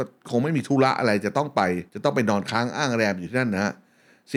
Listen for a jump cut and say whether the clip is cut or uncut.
cut